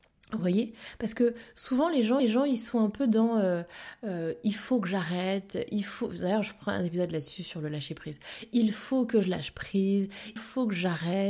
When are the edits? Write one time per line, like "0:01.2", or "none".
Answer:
0:02.2
0:10.4